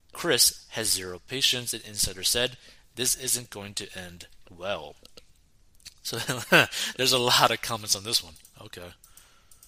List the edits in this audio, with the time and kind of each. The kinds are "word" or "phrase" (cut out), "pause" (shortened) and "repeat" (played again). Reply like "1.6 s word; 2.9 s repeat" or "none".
none